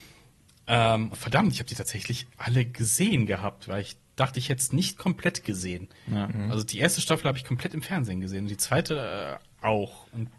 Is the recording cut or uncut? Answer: cut